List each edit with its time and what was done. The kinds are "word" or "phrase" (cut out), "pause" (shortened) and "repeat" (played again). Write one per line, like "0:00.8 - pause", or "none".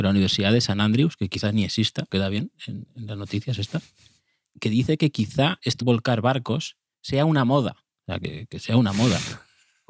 0:02.1 - word
0:04.4 - word
0:05.8 - word
0:06.9 - pause
0:07.9 - pause
0:08.5 - word